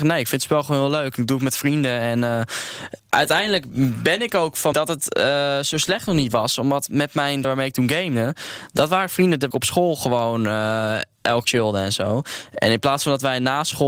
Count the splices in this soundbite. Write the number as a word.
five